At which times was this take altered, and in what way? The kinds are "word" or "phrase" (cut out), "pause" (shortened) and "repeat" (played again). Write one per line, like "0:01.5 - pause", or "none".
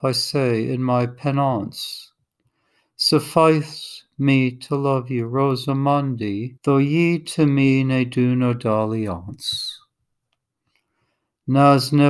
0:06.6 - pause

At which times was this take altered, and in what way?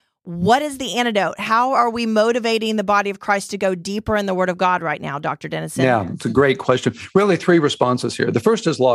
none

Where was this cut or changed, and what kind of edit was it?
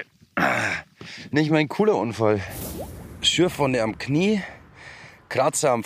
none

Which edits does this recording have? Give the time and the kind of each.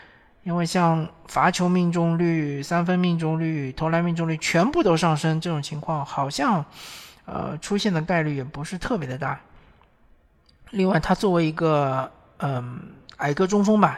none

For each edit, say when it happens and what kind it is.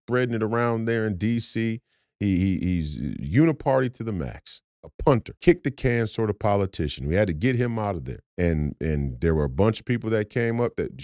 0:04.7 - pause
0:05.4 - pause
0:08.3 - pause

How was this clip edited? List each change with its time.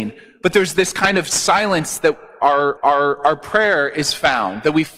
0:02.8 - repeat

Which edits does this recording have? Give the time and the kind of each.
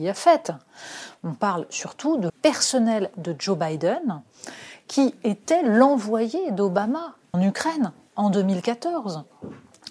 0:02.3 - word
0:07.3 - word

